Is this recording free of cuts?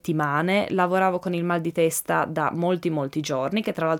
yes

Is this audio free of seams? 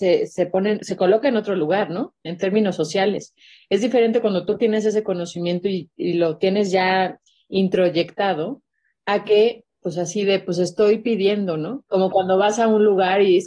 no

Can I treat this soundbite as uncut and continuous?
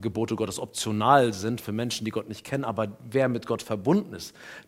yes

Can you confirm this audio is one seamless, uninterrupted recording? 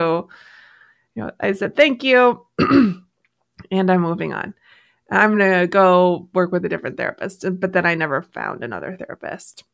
yes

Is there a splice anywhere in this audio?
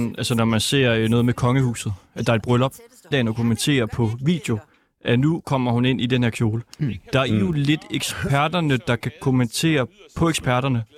yes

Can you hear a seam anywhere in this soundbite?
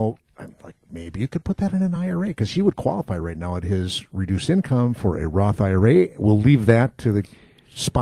no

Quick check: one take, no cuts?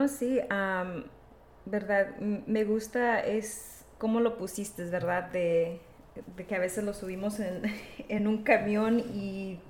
yes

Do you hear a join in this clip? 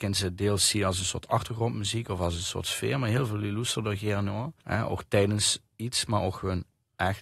yes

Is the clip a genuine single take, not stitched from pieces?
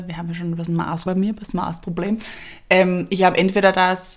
no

